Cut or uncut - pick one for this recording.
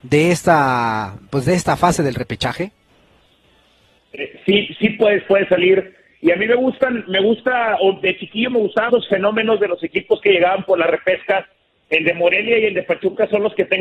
cut